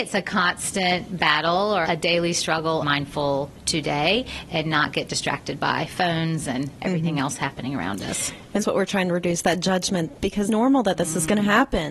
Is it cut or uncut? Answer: cut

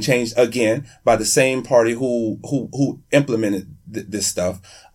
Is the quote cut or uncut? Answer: uncut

